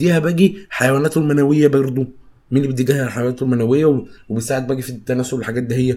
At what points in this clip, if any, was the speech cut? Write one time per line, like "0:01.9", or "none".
none